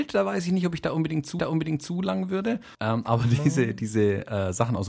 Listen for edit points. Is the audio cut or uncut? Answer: cut